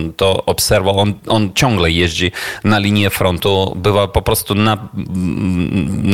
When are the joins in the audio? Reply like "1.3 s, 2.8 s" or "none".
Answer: none